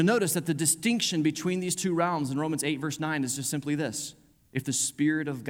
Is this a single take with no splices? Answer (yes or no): yes